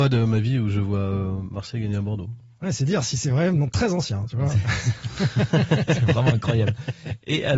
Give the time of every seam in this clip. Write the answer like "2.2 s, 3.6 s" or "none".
none